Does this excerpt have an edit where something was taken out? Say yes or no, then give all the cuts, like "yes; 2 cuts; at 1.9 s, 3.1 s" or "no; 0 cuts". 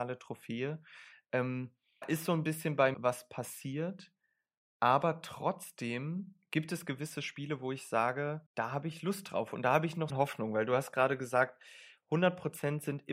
yes; 4 cuts; at 2.0 s, 2.9 s, 8.5 s, 10.1 s